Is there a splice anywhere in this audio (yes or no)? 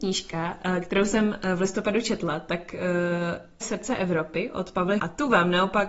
yes